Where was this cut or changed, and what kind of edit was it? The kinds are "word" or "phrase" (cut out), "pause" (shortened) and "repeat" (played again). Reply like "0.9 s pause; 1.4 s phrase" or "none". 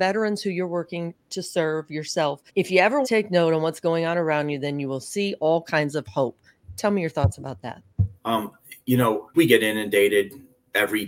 2.5 s pause; 3.0 s phrase; 8.2 s pause; 9.3 s phrase